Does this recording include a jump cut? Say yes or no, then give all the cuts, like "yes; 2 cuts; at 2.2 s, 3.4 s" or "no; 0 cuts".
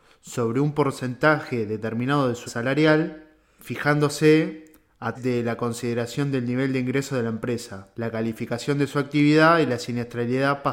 yes; 4 cuts; at 2.5 s, 3.6 s, 5.1 s, 7.9 s